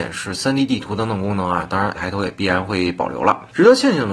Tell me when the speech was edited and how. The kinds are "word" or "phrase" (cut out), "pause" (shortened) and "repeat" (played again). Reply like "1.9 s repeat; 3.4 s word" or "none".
1.9 s word